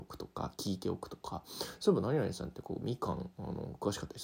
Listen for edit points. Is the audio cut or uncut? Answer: uncut